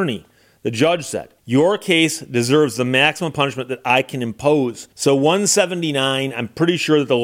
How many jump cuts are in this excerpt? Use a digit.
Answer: 2